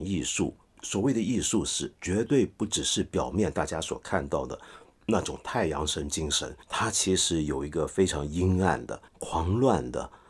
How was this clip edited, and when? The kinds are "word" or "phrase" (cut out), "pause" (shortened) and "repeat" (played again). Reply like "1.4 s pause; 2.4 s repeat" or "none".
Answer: 2.0 s pause; 6.6 s pause; 9.1 s pause